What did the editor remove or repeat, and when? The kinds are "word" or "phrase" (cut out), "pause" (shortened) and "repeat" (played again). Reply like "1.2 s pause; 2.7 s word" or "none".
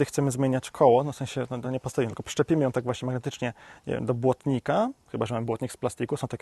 none